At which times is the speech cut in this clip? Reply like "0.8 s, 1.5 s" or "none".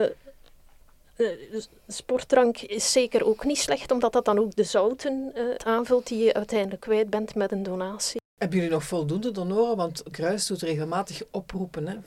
5.6 s, 6.8 s, 8.3 s, 10.1 s